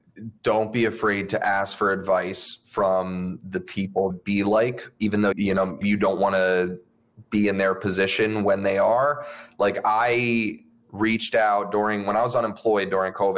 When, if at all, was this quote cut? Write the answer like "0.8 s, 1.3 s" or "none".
4.1 s, 5.3 s, 5.8 s